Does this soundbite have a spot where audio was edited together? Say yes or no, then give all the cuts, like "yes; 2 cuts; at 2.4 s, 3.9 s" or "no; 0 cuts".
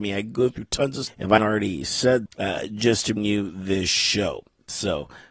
yes; 4 cuts; at 1.1 s, 1.4 s, 2.3 s, 3.2 s